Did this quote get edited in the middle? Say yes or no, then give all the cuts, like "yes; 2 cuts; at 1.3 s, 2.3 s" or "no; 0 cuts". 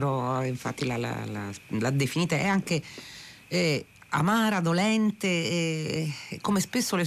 no; 0 cuts